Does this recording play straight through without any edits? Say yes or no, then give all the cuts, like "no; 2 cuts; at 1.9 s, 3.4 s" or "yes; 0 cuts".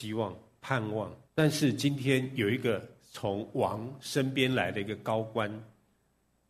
no; 1 cut; at 1.2 s